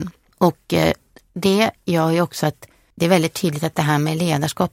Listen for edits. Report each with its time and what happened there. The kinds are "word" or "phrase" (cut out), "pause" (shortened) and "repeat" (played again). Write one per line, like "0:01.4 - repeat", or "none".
none

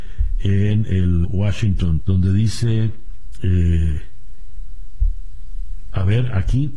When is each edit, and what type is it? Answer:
0:01.2 - word
0:02.0 - word

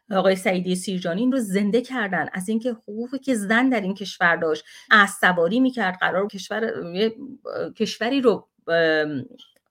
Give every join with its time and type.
0:01.3 - word
0:04.9 - word
0:06.3 - word

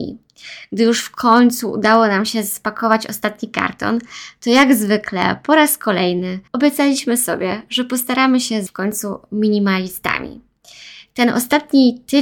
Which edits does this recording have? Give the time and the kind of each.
0:06.5 - pause
0:08.7 - word

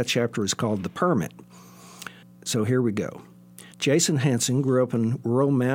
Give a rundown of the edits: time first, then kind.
0:02.2 - pause
0:03.7 - pause

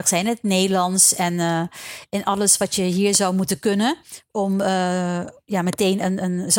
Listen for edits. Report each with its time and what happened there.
none

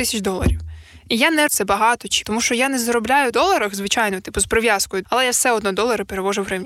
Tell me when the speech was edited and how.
0:01.5 - word
0:02.2 - word
0:03.3 - phrase
0:05.0 - word

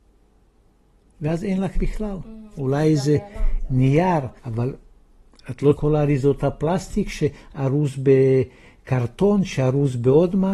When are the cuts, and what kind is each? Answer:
0:01.7 - word
0:04.4 - pause
0:05.7 - phrase

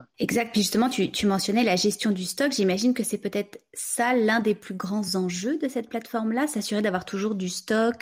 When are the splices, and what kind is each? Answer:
none

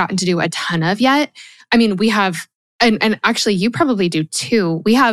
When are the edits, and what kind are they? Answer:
none

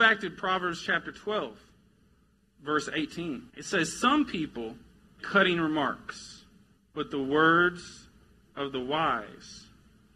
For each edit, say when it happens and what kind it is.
0:03.5 - pause
0:05.2 - word
0:06.8 - pause

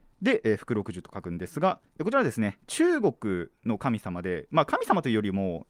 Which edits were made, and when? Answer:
0:01.9 - pause

